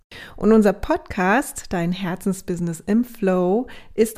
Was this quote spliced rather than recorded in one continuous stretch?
no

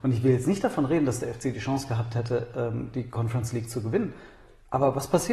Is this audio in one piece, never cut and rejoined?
yes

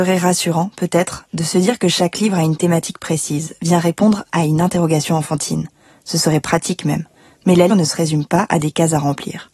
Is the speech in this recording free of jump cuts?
no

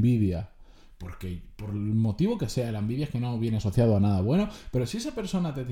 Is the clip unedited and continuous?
yes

